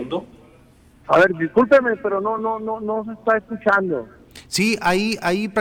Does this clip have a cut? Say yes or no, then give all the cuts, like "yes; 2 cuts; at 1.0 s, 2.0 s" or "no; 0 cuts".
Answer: no; 0 cuts